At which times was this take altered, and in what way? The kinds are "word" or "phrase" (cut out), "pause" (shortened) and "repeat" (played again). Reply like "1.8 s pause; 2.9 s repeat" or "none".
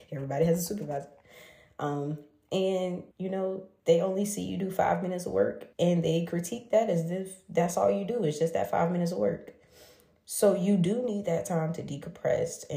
3.1 s pause; 5.7 s pause